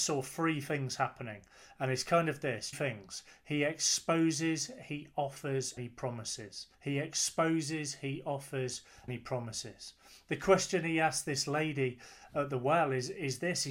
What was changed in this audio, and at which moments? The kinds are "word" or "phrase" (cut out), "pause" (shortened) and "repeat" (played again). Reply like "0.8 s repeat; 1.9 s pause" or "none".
2.7 s phrase; 5.8 s word; 6.7 s pause; 9.1 s word